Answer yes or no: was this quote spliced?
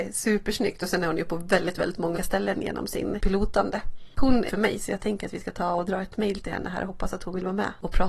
yes